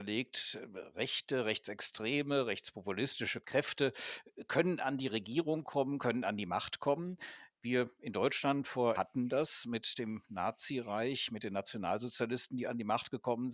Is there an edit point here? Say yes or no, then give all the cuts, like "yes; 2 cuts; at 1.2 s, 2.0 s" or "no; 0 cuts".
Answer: yes; 1 cut; at 9.0 s